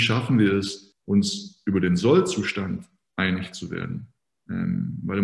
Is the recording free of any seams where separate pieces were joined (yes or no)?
yes